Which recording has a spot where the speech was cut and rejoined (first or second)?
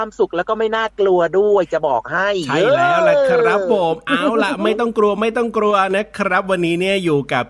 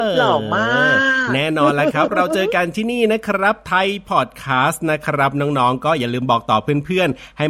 second